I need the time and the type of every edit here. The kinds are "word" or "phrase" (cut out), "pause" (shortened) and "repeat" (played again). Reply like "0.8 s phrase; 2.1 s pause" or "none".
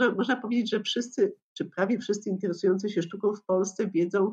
none